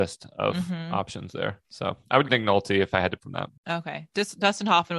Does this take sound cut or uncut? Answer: cut